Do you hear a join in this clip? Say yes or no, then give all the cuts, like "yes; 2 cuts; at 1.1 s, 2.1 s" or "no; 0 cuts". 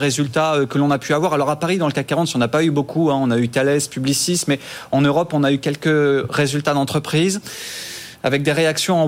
no; 0 cuts